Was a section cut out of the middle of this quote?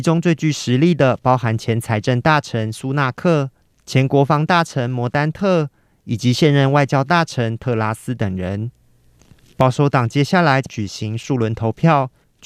no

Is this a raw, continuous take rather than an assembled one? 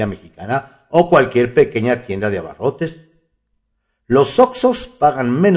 yes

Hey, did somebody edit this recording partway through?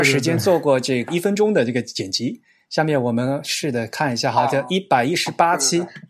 no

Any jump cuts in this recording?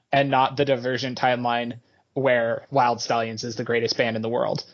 yes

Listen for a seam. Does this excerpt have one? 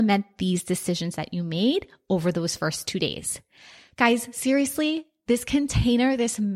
no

